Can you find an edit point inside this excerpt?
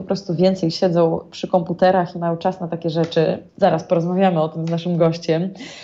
yes; 1 cut; at 3.5 s

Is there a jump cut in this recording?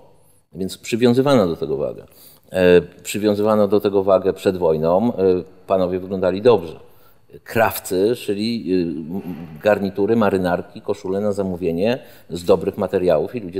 no; 0 cuts

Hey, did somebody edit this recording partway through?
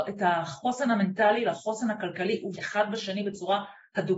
yes; 1 cut; at 2.5 s

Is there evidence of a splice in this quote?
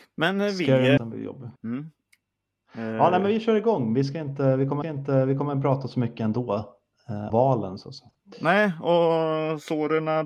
yes; 4 cuts; at 1.0 s, 1.6 s, 4.8 s, 7.3 s

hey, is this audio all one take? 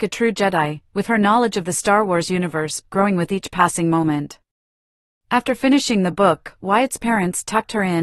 yes; 0 cuts

